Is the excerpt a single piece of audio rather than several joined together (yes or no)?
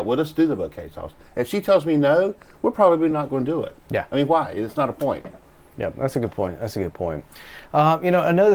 yes